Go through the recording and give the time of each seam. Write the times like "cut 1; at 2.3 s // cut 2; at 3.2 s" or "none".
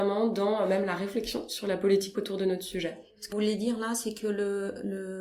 cut 1; at 2.1 s // cut 2; at 3.3 s